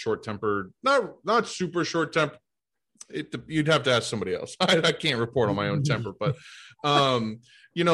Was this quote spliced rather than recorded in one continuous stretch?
no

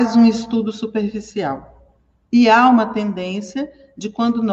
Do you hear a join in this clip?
no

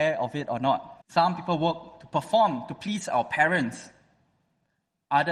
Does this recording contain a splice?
yes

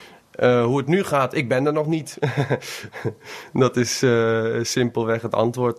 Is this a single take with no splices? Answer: yes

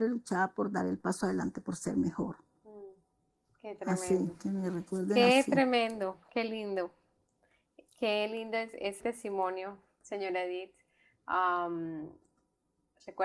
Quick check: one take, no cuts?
no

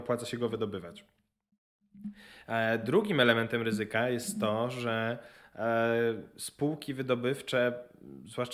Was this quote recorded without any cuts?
yes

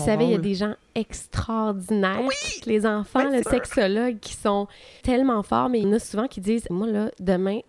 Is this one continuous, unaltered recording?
no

